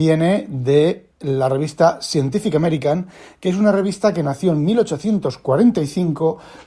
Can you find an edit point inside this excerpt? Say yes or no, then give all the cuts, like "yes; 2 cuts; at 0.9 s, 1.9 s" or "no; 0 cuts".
no; 0 cuts